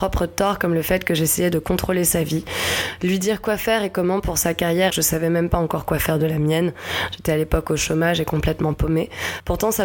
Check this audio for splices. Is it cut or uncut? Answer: cut